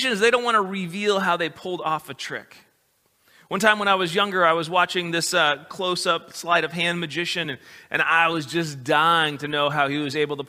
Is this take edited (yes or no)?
no